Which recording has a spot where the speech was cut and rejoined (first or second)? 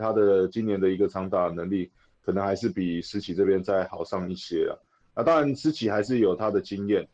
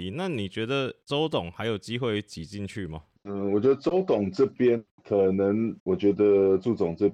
second